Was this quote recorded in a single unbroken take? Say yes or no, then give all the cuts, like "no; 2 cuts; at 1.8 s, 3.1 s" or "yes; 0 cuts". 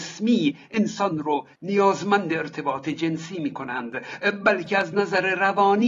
yes; 0 cuts